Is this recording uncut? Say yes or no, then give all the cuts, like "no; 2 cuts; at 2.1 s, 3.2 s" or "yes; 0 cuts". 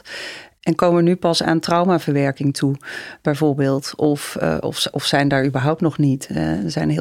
yes; 0 cuts